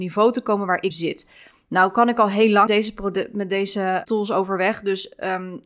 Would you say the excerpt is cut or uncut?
cut